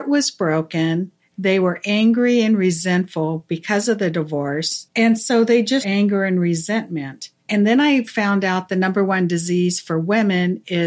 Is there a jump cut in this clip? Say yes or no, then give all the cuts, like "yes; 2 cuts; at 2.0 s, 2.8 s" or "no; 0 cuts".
yes; 2 cuts; at 5.8 s, 7.4 s